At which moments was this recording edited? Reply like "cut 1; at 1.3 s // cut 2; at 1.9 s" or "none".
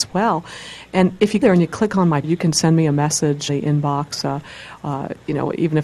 cut 1; at 1.4 s // cut 2; at 2.2 s // cut 3; at 3.5 s

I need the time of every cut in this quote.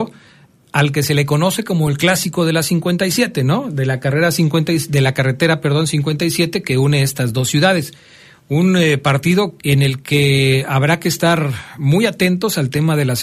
cut 1; at 9.6 s

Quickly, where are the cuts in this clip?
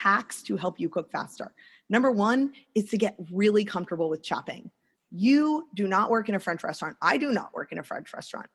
none

